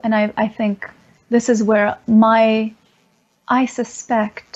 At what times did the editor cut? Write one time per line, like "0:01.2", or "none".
none